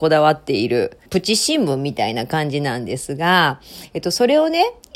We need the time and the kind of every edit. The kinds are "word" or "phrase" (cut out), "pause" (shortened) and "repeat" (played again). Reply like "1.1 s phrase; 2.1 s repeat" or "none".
1.1 s pause